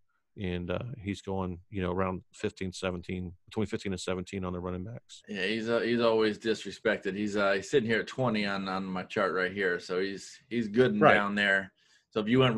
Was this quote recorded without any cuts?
yes; 0 cuts

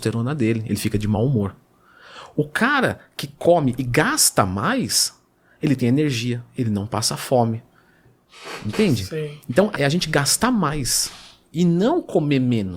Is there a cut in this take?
yes; 1 cut; at 9.7 s

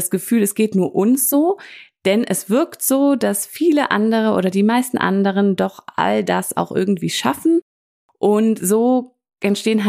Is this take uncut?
yes; 0 cuts

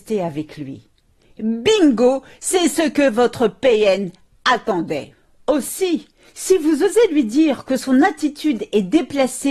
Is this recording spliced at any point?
no; 0 cuts

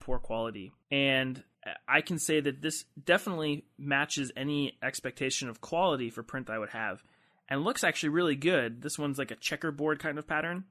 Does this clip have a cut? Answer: no; 0 cuts

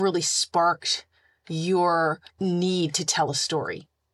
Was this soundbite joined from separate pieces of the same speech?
yes; 1 cut; at 2.3 s

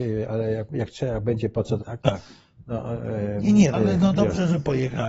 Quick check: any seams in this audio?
yes; 3 cuts; at 1.8 s, 3.7 s, 4.1 s

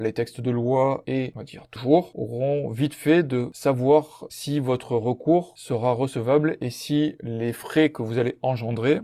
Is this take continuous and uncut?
no; 2 cuts; at 1.3 s, 1.8 s

